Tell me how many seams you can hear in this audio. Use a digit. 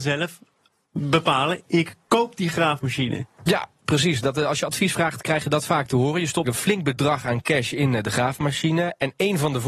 1